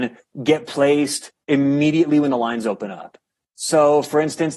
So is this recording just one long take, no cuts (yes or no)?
yes